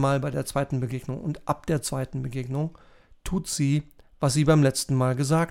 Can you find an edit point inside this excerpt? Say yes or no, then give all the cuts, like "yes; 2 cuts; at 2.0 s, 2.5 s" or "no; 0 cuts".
no; 0 cuts